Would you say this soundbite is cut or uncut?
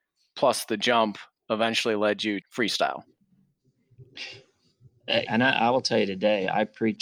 cut